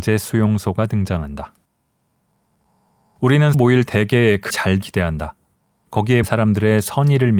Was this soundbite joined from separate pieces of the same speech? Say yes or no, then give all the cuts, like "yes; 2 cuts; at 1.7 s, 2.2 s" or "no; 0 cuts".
yes; 5 cuts; at 3.5 s, 3.8 s, 4.5 s, 4.8 s, 6.2 s